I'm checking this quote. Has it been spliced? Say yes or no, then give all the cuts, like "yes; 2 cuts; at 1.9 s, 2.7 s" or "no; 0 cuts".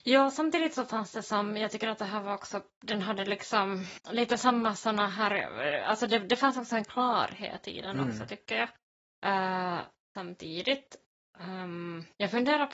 no; 0 cuts